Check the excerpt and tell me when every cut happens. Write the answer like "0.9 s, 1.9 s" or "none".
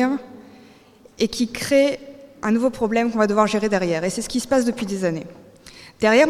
none